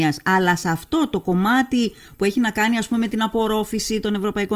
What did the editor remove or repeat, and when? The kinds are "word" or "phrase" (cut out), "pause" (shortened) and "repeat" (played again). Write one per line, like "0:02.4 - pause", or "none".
none